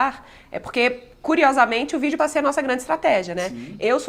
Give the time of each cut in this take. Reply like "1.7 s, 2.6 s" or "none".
1.1 s, 2.2 s